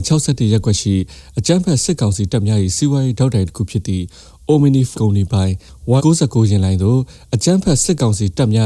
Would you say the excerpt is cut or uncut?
cut